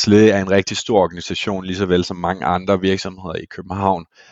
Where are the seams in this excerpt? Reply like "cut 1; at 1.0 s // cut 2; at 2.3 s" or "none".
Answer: none